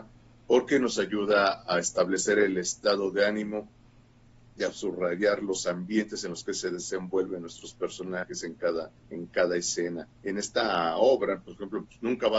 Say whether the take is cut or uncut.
cut